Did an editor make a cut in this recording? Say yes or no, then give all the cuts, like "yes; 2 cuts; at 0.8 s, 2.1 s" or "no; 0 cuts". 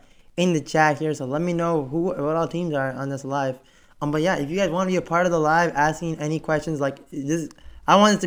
no; 0 cuts